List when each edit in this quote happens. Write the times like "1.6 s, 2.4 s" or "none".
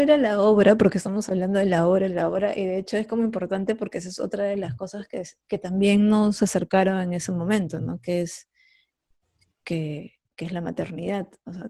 5.4 s, 10.2 s